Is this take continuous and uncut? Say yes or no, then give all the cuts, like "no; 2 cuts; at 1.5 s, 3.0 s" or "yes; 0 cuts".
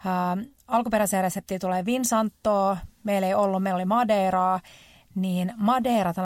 yes; 0 cuts